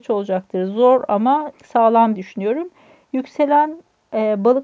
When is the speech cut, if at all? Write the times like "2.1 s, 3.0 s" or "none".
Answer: 1.5 s, 2.1 s